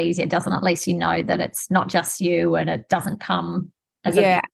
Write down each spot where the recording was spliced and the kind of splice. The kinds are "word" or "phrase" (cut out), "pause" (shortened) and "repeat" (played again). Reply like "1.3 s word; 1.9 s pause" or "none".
none